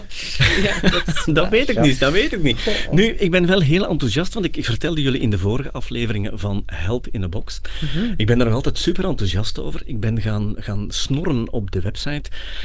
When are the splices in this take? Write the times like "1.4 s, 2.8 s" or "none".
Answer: none